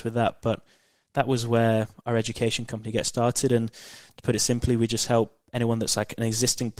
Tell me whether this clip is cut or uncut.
uncut